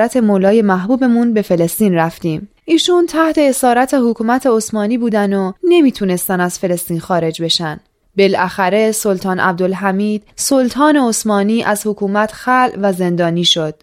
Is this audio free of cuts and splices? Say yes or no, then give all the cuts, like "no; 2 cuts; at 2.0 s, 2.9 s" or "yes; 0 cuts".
no; 3 cuts; at 2.6 s, 8.0 s, 10.3 s